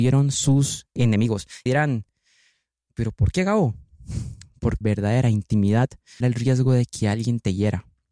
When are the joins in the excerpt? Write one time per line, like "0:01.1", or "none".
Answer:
0:01.0
0:01.7
0:04.8
0:06.2

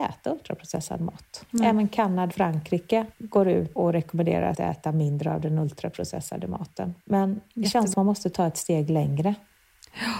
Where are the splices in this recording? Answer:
0:01.5
0:02.3
0:03.1
0:03.8
0:04.5
0:07.0
0:07.9

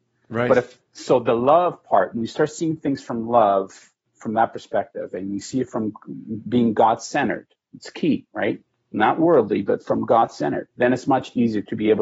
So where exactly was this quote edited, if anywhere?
0:08.7
0:10.7

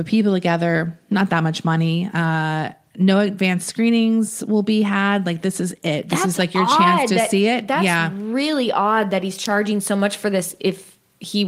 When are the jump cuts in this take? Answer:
none

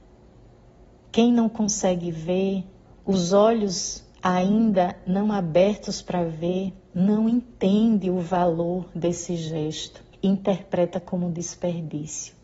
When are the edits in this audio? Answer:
0:02.9
0:10.1

